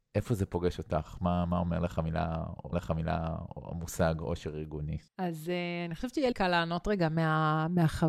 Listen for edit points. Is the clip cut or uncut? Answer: cut